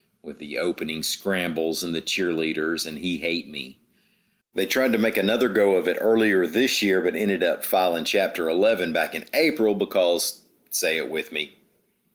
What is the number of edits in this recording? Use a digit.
0